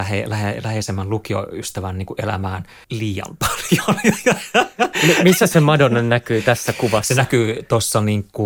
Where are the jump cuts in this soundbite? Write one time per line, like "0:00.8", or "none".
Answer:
0:02.8